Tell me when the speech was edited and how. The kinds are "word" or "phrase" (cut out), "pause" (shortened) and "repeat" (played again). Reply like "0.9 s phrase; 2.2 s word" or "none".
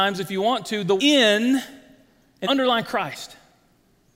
1.0 s word; 2.4 s word